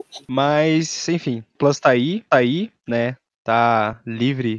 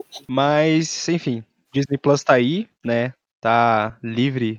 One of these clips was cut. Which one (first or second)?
first